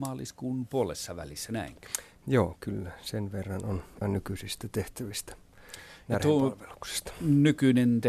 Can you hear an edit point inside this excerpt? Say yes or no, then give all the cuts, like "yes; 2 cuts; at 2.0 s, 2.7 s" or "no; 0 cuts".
yes; 1 cut; at 4.0 s